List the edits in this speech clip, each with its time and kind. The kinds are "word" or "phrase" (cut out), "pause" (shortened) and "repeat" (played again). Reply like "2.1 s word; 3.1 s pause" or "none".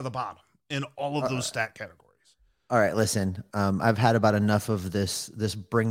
none